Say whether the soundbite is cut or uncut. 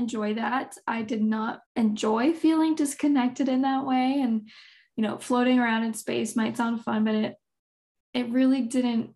cut